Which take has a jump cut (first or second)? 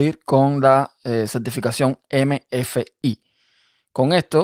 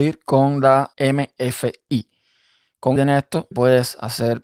second